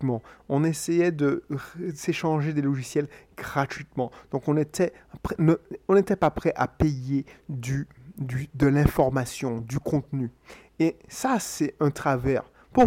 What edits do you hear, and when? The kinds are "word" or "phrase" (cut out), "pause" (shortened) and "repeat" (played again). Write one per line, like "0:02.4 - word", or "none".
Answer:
none

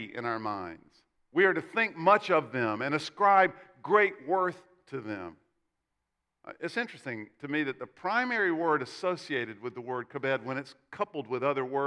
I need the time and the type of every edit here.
none

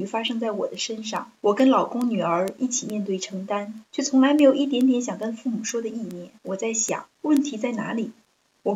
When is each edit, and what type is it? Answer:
0:01.4 - pause
0:03.9 - pause
0:06.4 - pause
0:07.1 - pause

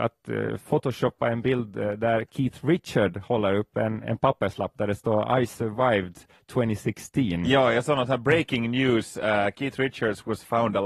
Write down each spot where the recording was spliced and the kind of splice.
none

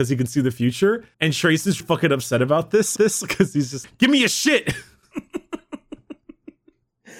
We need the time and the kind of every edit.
0:01.1 - pause
0:01.8 - word
0:03.0 - repeat
0:03.8 - word

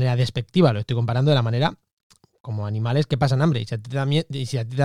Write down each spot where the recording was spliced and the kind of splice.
none

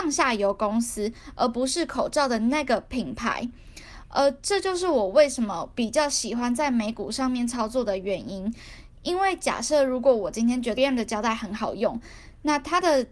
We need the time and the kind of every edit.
0:10.8 - word

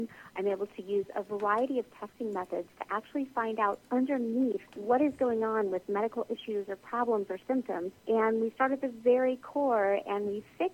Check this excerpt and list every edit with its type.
0:04.7 - pause
0:08.0 - pause

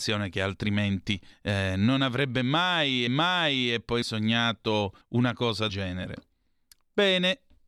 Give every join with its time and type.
0:01.3 - pause
0:03.1 - repeat
0:04.0 - word
0:05.0 - pause
0:05.7 - word

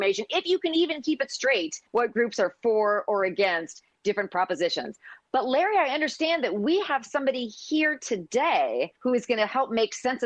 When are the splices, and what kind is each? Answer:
0:01.9 - pause
0:09.0 - pause

